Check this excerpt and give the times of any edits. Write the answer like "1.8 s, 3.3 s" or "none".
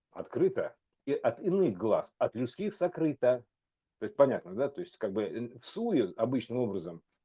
none